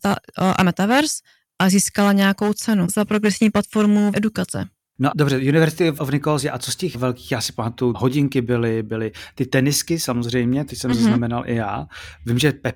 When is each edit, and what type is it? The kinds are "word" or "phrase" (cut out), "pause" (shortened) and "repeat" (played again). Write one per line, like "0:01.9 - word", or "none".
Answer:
0:02.9 - word
0:04.1 - word
0:05.1 - word
0:06.0 - word
0:06.9 - word
0:07.9 - word